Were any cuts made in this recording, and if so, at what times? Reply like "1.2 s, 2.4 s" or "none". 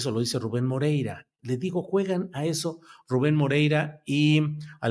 none